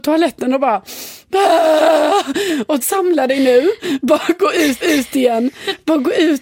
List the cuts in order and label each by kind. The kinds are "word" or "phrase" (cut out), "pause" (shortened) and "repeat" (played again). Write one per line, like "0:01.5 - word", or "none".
0:02.8 - phrase
0:04.8 - repeat